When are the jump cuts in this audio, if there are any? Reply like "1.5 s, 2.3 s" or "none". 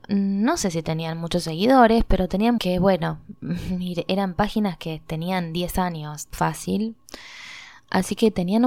2.6 s